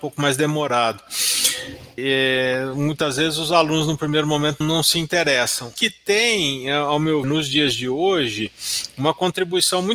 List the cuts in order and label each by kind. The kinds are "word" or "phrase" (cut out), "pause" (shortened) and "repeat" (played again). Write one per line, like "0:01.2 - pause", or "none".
0:02.0 - word
0:04.6 - word
0:05.8 - word
0:07.2 - word